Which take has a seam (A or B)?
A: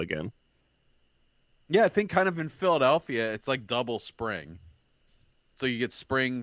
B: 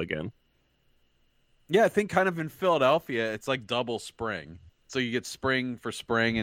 B